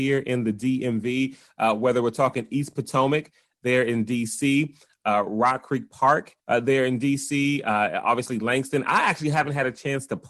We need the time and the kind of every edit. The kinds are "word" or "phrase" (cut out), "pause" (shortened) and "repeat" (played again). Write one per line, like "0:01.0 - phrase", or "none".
0:06.4 - pause